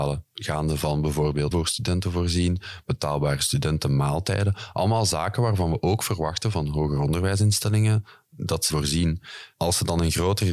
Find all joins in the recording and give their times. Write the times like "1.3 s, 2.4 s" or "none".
1.5 s, 8.7 s